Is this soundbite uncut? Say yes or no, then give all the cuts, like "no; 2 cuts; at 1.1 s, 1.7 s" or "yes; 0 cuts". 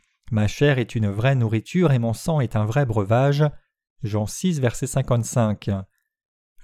yes; 0 cuts